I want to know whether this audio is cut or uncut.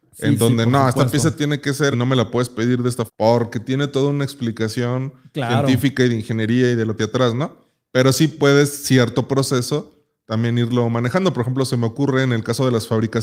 cut